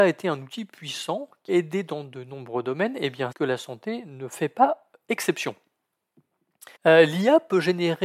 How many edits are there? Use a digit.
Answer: 3